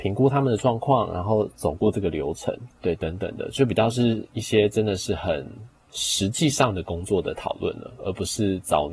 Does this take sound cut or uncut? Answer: cut